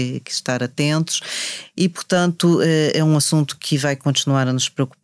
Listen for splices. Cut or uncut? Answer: uncut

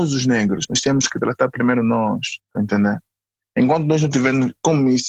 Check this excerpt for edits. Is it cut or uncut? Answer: uncut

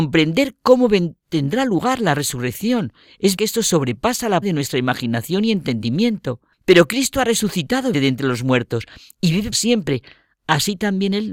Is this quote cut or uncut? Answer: cut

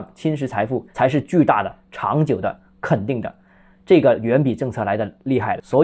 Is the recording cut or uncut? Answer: cut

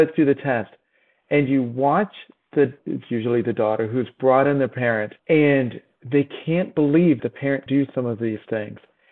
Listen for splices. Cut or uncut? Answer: cut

